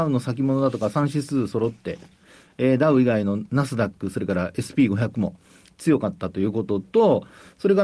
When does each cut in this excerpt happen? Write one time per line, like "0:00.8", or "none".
none